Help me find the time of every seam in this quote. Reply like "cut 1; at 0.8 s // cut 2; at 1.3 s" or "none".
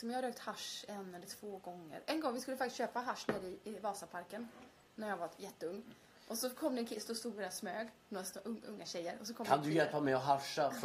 none